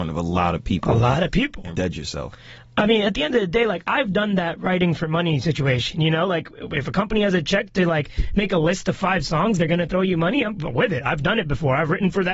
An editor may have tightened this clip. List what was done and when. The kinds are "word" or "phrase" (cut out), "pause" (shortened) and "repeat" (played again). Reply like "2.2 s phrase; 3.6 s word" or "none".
1.7 s word

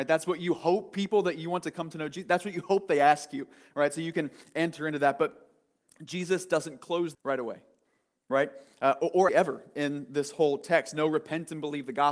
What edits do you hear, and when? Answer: 7.1 s word; 9.3 s word

